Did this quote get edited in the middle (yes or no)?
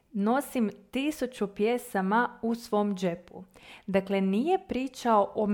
no